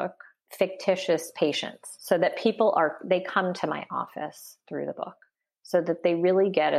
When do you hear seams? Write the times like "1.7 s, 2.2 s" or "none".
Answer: none